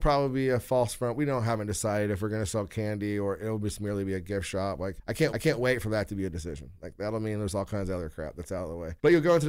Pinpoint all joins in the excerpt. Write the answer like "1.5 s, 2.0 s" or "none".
5.3 s